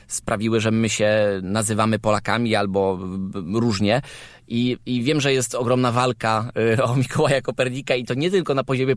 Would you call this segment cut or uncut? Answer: uncut